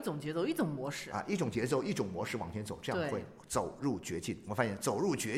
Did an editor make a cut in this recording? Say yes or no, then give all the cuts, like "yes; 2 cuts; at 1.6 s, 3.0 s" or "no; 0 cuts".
no; 0 cuts